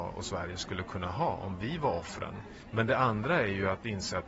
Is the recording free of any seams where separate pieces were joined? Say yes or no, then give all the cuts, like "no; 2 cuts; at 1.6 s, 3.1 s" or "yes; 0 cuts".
yes; 0 cuts